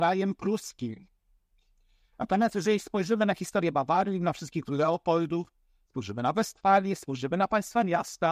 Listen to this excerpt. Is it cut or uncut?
cut